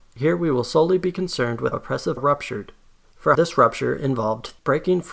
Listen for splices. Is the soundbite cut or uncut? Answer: cut